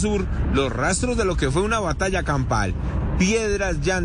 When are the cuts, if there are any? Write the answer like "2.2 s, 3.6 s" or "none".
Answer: none